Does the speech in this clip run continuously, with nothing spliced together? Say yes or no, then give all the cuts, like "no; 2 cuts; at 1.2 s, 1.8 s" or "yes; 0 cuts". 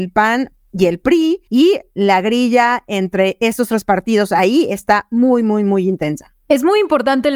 no; 1 cut; at 1.5 s